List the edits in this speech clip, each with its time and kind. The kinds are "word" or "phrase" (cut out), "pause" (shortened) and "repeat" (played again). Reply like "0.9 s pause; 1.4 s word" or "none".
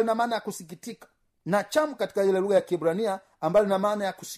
none